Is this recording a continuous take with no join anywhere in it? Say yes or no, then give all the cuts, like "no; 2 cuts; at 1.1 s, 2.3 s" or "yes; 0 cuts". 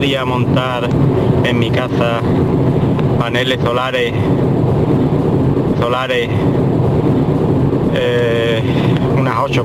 no; 1 cut; at 5.7 s